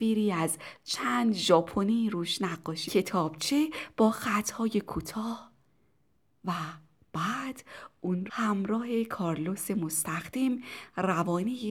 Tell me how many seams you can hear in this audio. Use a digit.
2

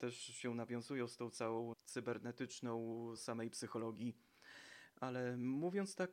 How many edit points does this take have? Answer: 2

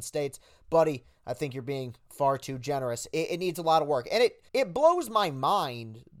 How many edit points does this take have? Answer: 1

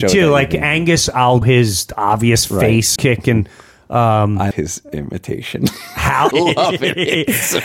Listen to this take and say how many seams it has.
4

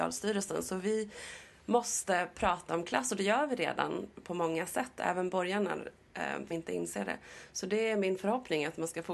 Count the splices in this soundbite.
2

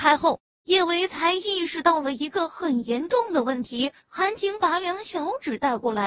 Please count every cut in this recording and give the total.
1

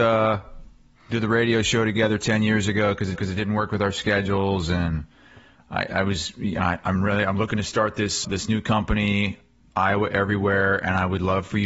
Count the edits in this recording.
2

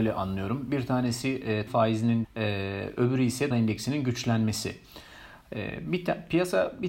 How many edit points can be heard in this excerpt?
3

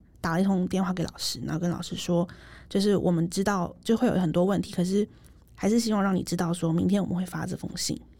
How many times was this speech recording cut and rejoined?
0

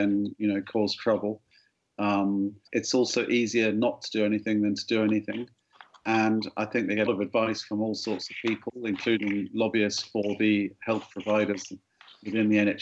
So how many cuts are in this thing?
2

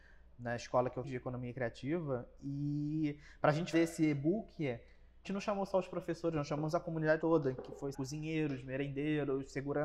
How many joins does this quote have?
5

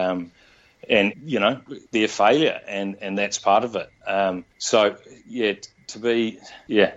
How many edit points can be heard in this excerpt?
3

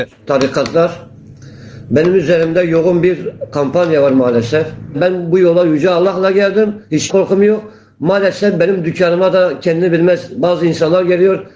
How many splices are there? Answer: 1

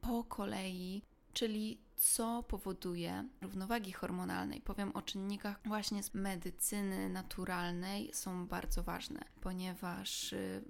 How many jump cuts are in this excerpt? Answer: 4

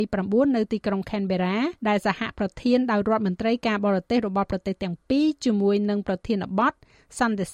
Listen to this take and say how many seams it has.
1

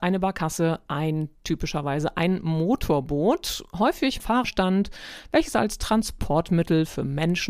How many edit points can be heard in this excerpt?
1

